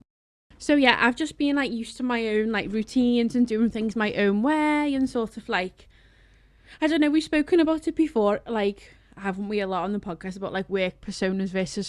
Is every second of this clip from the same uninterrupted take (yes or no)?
yes